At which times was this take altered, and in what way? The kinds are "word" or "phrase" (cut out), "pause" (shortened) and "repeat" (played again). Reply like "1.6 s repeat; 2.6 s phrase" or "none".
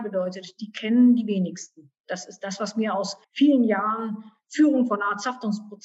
3.2 s pause